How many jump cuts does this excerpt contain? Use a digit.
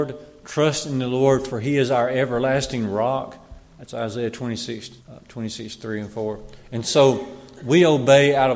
1